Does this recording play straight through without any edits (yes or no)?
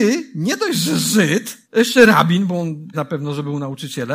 no